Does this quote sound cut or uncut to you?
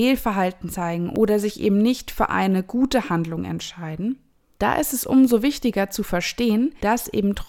uncut